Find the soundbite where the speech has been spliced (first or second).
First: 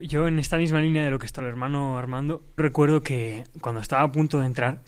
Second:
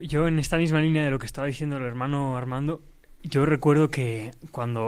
first